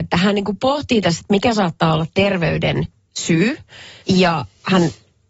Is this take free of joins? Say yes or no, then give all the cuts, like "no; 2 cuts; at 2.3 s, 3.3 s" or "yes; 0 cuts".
no; 1 cut; at 4.0 s